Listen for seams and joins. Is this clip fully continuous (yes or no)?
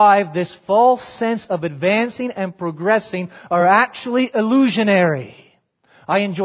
yes